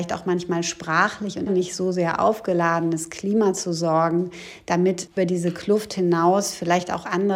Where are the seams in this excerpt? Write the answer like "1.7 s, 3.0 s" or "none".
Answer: 1.5 s, 5.2 s

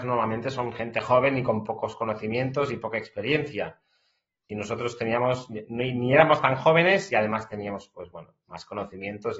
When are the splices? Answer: none

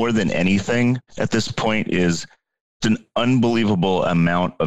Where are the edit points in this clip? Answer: 1.1 s, 2.8 s

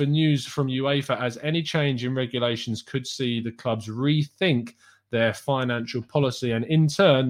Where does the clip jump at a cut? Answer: none

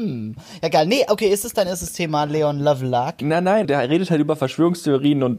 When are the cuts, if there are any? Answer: 3.6 s

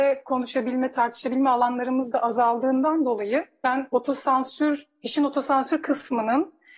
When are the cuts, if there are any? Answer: none

